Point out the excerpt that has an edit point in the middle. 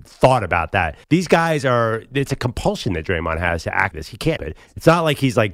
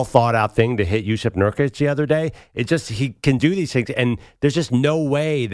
first; 3 cuts; at 1.0 s, 3.9 s, 4.4 s

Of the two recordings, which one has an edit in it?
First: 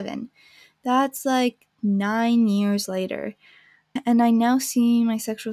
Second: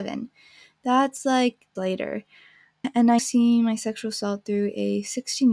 second; 2 cuts; at 1.8 s, 3.2 s

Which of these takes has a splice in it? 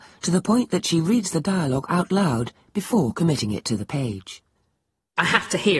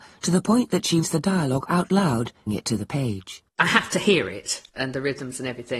second; 4 cuts; at 1.0 s, 2.5 s, 3.5 s, 4.7 s

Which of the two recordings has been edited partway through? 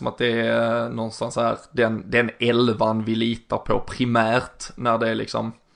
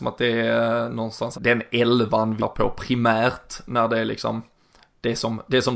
second; 2 cuts; at 1.3 s, 2.4 s

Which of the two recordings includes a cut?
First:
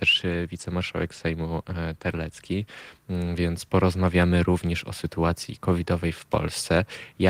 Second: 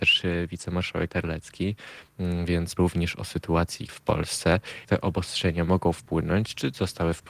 second; 4 cuts; at 1.1 s, 2.8 s, 3.9 s, 4.8 s

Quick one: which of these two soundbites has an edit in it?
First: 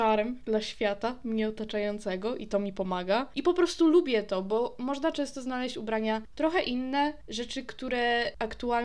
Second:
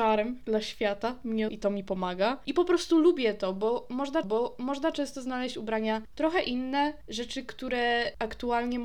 second; 2 cuts; at 1.5 s, 4.2 s

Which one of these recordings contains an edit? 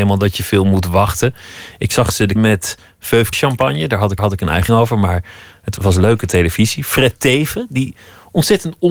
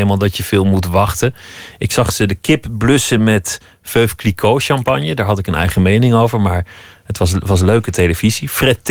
first; 5 cuts; at 2.4 s, 3.3 s, 4.2 s, 4.7 s, 5.8 s

